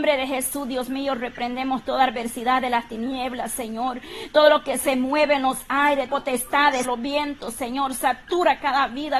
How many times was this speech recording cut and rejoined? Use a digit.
2